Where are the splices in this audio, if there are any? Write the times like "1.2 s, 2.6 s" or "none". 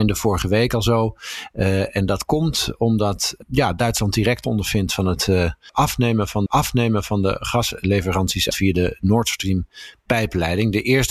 4.4 s, 6.5 s, 8.5 s